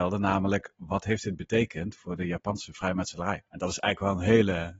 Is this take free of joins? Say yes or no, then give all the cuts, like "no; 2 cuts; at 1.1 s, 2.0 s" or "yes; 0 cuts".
no; 1 cut; at 3.5 s